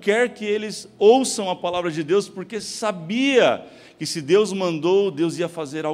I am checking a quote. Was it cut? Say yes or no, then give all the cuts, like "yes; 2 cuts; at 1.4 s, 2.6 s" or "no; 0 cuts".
no; 0 cuts